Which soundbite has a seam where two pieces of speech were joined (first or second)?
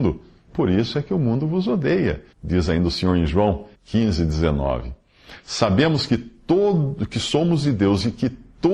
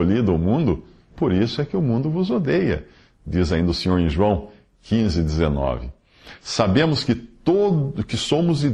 first